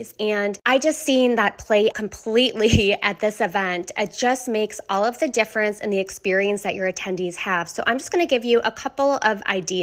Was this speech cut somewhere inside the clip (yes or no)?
yes